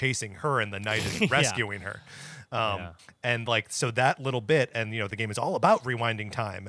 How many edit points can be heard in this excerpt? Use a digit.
0